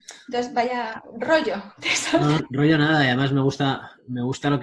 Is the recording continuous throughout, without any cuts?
no; 1 cut; at 2.4 s

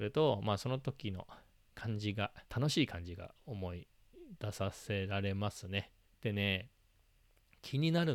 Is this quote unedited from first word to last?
no; 2 cuts; at 2.5 s, 6.1 s

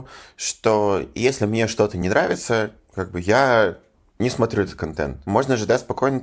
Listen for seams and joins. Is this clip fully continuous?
yes; 0 cuts

